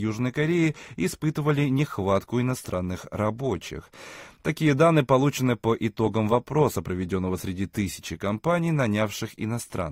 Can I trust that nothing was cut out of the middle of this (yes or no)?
yes